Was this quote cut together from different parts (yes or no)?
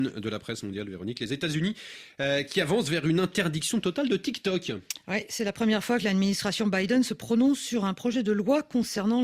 no